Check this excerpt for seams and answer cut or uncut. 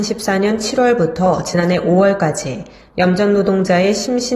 uncut